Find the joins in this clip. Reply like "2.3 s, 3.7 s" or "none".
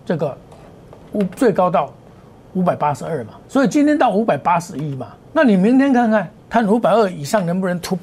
3.4 s, 5.2 s, 6.4 s

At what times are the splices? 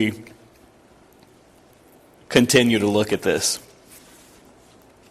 none

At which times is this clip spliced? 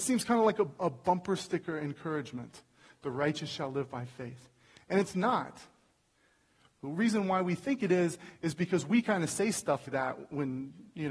9.8 s

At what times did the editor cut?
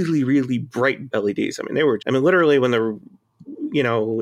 1.1 s, 2.0 s

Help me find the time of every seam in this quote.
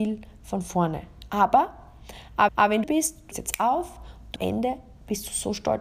2.5 s, 2.8 s, 3.3 s, 4.4 s

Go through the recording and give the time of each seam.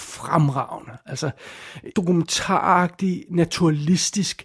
1.9 s

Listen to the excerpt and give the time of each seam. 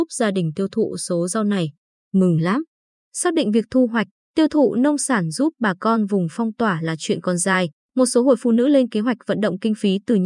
none

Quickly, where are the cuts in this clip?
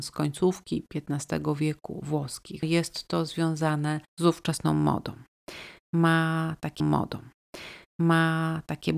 2.6 s, 4.1 s, 6.8 s

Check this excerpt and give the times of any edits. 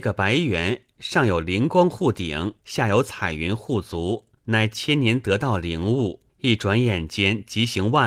2.6 s, 4.4 s, 6.3 s

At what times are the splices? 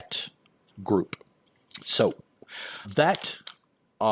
2.8 s

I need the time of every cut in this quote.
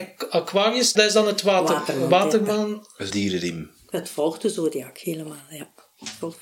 1.0 s, 3.1 s

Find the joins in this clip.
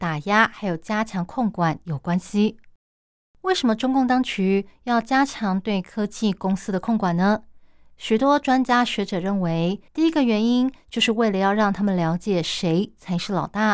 9.9 s

